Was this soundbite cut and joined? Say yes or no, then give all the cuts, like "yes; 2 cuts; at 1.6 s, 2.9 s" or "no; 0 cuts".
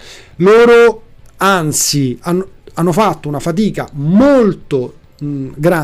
no; 0 cuts